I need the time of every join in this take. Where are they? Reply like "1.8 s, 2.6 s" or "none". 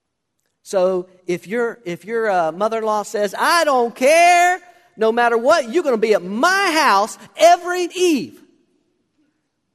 7.9 s